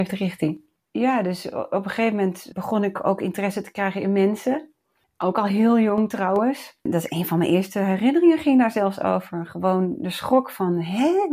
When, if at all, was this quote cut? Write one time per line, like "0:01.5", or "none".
none